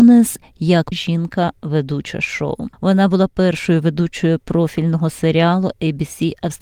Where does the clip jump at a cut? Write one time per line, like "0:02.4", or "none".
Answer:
0:00.9
0:02.7